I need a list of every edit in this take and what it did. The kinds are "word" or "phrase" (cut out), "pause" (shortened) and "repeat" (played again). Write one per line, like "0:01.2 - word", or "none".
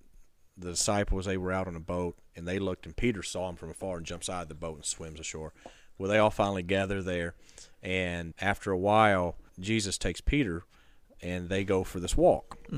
0:08.3 - word
0:09.5 - pause